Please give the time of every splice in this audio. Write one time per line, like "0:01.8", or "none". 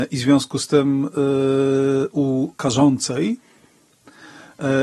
0:02.6